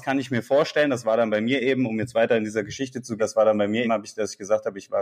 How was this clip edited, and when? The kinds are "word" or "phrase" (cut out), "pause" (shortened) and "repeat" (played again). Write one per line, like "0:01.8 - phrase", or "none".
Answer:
0:03.2 - word
0:03.8 - word